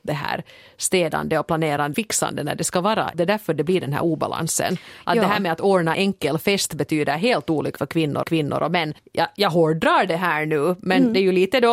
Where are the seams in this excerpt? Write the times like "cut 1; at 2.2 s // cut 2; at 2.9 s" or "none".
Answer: cut 1; at 1.9 s // cut 2; at 3.1 s // cut 3; at 5.9 s // cut 4; at 7.8 s // cut 5; at 8.2 s // cut 6; at 9.0 s